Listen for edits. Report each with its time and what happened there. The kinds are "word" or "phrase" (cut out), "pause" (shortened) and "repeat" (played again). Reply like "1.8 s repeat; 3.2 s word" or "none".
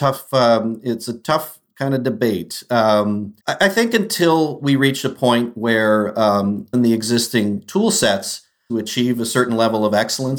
3.4 s pause; 6.7 s word; 8.7 s phrase

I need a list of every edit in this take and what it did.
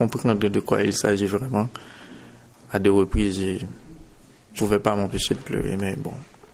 4.6 s word

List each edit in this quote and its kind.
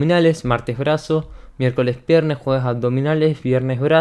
none

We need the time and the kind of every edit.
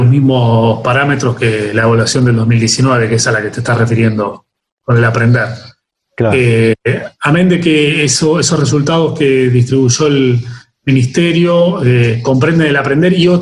none

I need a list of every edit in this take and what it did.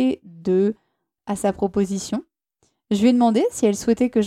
1.2 s word

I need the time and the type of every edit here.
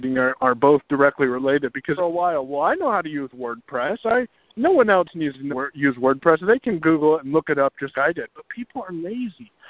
2.0 s phrase; 5.5 s phrase; 7.9 s word

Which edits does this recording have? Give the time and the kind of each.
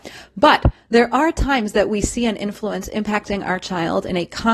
none

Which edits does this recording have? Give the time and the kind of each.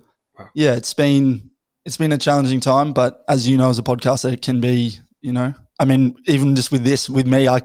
none

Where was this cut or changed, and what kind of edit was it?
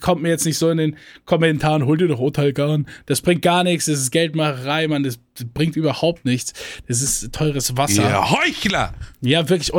none

